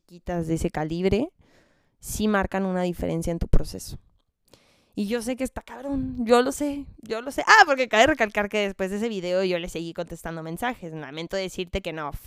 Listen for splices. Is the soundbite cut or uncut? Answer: uncut